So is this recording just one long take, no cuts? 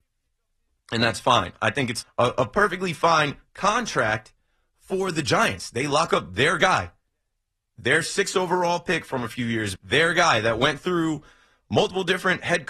no; 2 cuts; at 2.0 s, 9.8 s

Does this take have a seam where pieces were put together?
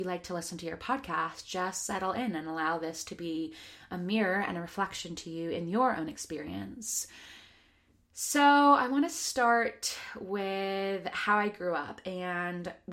no; 0 cuts

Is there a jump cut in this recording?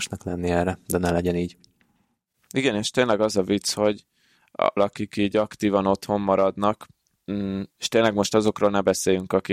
yes; 2 cuts; at 4.8 s, 7.7 s

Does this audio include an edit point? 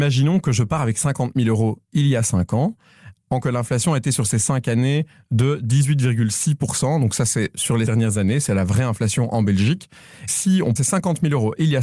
yes; 3 cuts; at 3.4 s, 7.9 s, 10.8 s

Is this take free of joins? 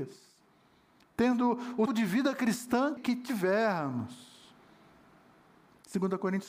no; 2 cuts; at 1.9 s, 3.0 s

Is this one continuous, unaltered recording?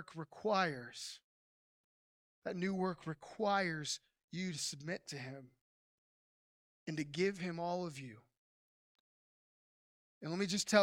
yes; 0 cuts

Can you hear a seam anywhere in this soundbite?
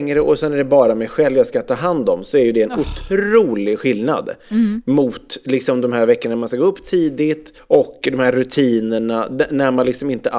yes; 1 cut; at 7.6 s

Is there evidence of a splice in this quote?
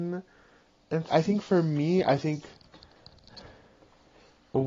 yes; 1 cut; at 1.1 s

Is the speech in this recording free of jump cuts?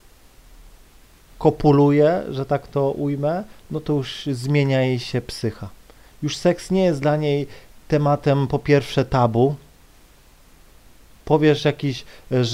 yes; 0 cuts

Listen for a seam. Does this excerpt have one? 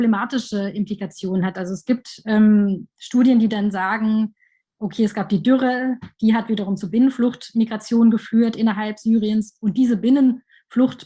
no; 0 cuts

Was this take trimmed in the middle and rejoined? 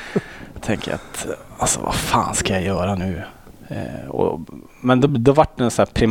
no; 0 cuts

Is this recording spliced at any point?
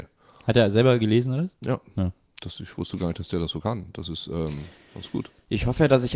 no; 0 cuts

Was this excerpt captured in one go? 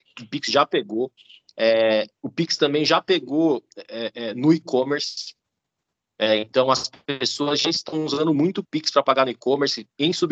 yes; 0 cuts

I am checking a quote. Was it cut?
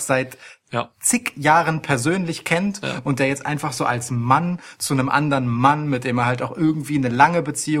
no; 0 cuts

